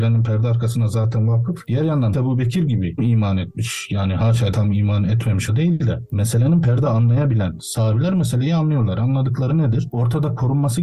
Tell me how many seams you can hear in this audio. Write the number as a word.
six